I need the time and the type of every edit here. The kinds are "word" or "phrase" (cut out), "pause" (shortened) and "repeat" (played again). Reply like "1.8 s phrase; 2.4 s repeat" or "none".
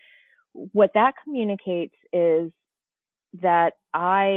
none